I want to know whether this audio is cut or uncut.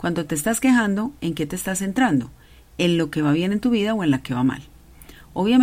uncut